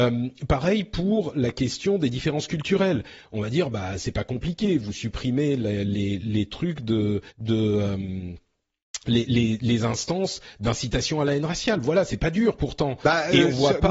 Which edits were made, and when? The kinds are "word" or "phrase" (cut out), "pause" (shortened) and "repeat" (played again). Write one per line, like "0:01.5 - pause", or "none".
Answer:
0:07.3 - pause